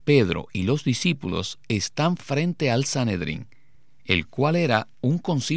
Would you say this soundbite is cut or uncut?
uncut